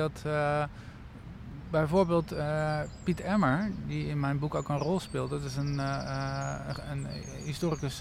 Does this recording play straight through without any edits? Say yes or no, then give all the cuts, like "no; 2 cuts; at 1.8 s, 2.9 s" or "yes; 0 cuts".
yes; 0 cuts